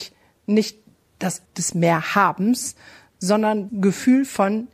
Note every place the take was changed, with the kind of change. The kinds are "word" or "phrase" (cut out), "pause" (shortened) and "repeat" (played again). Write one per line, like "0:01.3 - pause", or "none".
0:01.5 - word
0:03.7 - word